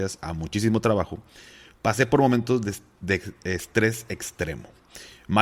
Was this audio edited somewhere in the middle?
no; 0 cuts

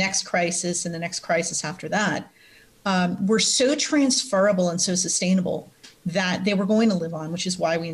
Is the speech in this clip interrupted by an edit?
no; 0 cuts

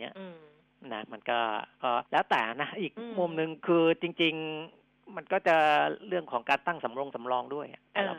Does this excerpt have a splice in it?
yes; 1 cut; at 2.1 s

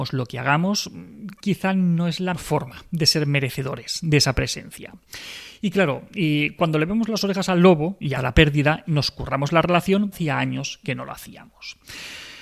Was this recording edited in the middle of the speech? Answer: yes; 4 cuts; at 2.3 s, 8.2 s, 8.9 s, 10.1 s

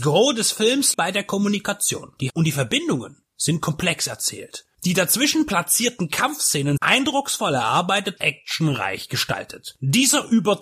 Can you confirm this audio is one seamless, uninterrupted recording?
no; 4 cuts; at 0.9 s, 2.3 s, 6.8 s, 8.2 s

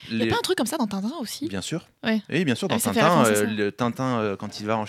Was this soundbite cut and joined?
no; 0 cuts

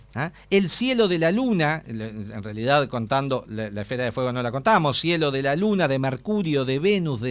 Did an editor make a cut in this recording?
no; 0 cuts

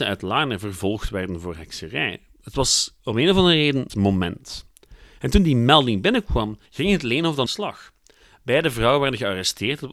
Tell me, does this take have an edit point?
yes; 4 cuts; at 3.0 s, 3.9 s, 6.7 s, 7.5 s

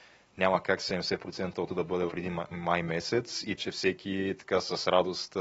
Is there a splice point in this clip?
yes; 3 cuts; at 1.7 s, 2.1 s, 3.6 s

